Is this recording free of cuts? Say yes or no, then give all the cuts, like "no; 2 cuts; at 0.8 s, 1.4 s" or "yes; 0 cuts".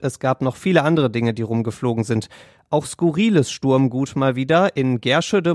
yes; 0 cuts